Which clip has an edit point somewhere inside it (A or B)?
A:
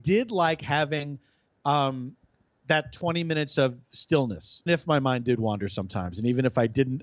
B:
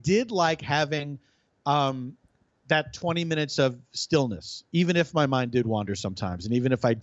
A